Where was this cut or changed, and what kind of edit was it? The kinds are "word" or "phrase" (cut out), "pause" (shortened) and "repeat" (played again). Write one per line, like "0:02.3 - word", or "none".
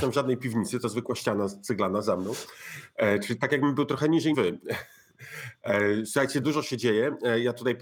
0:04.3 - word
0:06.4 - word